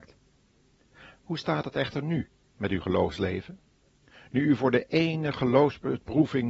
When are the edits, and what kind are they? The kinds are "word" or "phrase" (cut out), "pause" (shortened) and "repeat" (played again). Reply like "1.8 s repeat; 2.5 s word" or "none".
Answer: none